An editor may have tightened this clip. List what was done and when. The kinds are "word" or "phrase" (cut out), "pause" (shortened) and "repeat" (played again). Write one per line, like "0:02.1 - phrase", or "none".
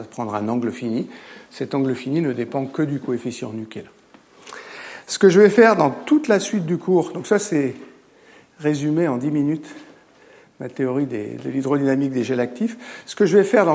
none